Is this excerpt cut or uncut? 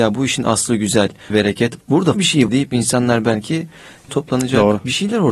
cut